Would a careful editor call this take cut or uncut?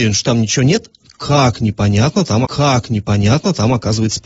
cut